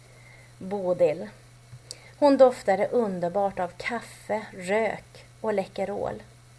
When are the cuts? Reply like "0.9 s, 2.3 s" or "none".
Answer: none